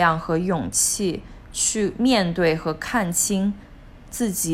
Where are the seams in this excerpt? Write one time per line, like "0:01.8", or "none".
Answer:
0:01.4